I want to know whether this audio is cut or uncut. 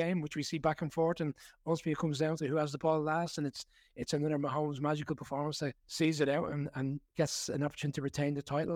cut